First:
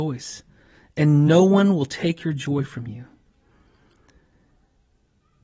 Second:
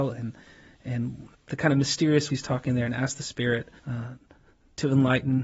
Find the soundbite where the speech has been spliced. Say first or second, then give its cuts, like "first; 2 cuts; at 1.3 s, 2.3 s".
second; 3 cuts; at 1.3 s, 2.3 s, 3.8 s